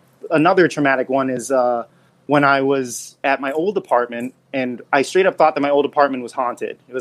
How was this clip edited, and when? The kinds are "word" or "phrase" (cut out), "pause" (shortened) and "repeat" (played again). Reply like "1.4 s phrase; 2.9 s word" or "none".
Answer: none